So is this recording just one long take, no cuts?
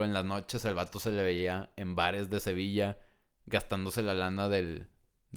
yes; 0 cuts

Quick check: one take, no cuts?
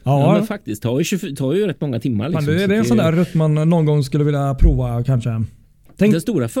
yes; 0 cuts

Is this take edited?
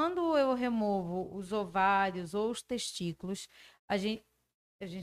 no; 0 cuts

